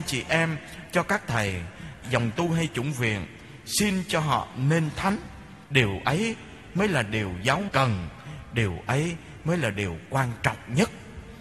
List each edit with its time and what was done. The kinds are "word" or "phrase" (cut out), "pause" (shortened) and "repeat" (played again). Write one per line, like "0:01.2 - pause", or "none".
0:02.0 - word
0:05.6 - pause
0:07.7 - word